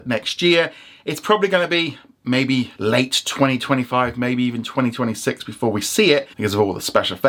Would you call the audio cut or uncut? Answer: cut